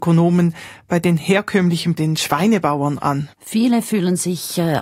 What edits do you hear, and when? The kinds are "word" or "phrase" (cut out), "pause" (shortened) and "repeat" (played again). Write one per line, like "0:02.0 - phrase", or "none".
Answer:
0:02.0 - word
0:03.3 - pause